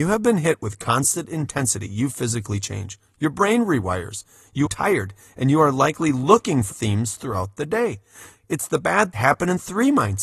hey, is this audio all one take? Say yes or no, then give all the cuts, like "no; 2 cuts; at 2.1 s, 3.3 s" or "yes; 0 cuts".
no; 3 cuts; at 4.7 s, 6.7 s, 9.1 s